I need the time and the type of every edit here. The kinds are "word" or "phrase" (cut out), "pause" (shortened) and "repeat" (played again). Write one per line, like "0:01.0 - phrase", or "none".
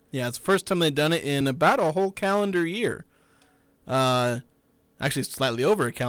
none